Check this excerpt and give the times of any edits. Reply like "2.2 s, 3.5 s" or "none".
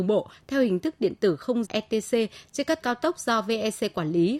1.6 s, 2.8 s